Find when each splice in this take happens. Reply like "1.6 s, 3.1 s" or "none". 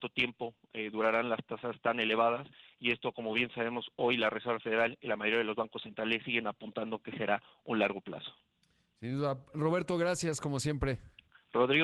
none